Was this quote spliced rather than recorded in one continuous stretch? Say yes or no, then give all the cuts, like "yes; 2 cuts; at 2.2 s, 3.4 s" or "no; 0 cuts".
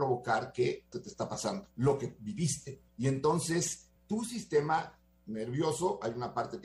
yes; 4 cuts; at 0.9 s, 1.7 s, 2.9 s, 4.0 s